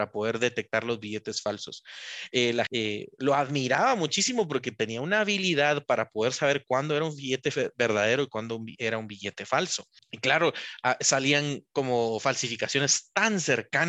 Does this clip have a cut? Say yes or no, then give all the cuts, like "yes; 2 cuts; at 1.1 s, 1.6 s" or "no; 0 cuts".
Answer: yes; 1 cut; at 2.7 s